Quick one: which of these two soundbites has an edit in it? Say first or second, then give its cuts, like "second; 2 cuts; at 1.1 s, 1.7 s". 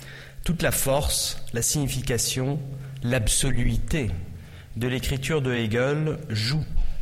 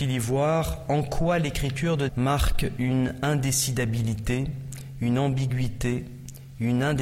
second; 1 cut; at 2.1 s